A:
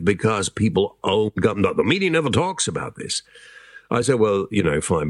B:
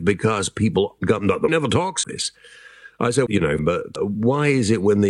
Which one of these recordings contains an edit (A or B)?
B